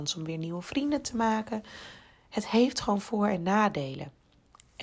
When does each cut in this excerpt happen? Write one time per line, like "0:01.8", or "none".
none

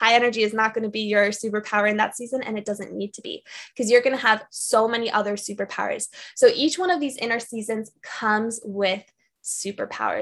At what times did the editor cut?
none

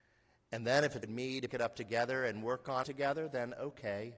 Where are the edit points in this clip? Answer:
0:01.0
0:01.5
0:02.8

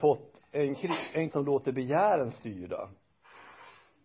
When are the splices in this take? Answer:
0:01.3

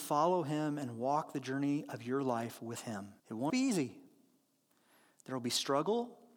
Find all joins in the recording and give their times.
0:03.2
0:03.5

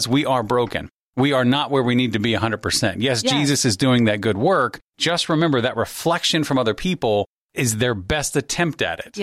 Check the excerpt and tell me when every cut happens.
none

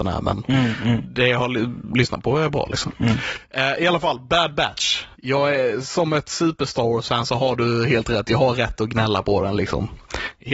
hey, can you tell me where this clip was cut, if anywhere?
0:05.1

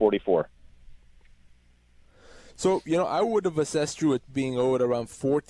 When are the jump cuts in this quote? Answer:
0:04.3

